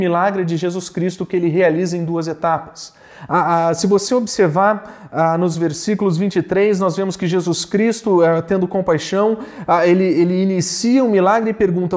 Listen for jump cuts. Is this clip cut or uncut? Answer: uncut